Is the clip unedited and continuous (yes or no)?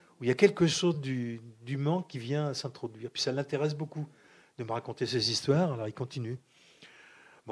yes